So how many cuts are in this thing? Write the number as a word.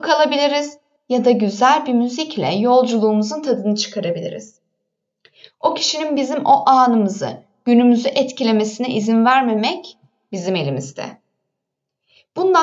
one